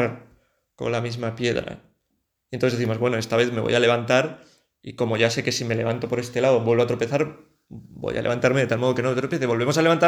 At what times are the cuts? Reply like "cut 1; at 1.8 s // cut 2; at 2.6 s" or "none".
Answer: none